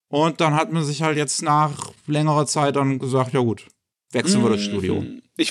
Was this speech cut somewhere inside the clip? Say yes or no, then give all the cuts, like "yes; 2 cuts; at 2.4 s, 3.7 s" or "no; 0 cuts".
no; 0 cuts